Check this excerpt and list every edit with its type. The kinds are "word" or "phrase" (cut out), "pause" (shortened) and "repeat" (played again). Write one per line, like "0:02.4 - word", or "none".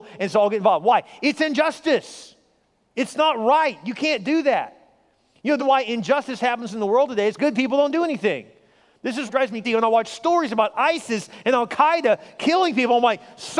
0:05.6 - word
0:07.4 - word
0:09.3 - word
0:09.6 - word